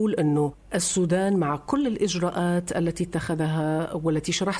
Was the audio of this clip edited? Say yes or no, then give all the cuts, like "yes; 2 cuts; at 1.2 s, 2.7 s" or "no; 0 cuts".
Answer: no; 0 cuts